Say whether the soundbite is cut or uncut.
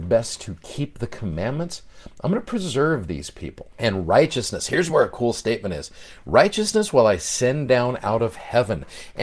uncut